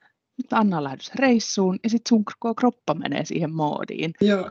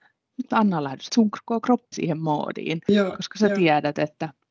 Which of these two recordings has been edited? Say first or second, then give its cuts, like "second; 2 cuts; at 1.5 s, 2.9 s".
second; 2 cuts; at 1.1 s, 1.9 s